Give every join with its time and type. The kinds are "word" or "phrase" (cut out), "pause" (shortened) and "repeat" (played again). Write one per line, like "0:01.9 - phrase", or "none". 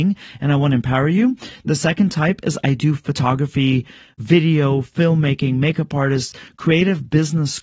none